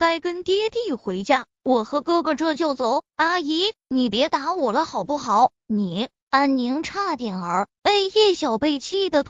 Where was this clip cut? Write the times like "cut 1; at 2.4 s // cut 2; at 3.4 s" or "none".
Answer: cut 1; at 5.6 s